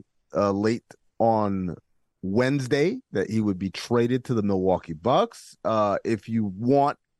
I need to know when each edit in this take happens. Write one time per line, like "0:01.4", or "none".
none